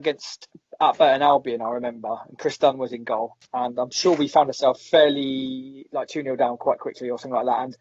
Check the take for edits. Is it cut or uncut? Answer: cut